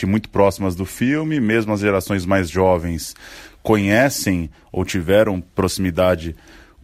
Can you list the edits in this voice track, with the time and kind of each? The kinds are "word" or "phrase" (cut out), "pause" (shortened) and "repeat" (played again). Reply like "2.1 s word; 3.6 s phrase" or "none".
none